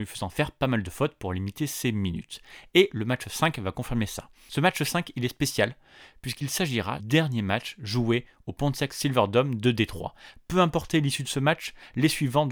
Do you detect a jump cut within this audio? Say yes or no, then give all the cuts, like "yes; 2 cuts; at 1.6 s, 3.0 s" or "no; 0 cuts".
yes; 1 cut; at 7.0 s